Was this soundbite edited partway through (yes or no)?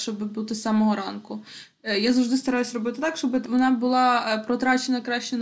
yes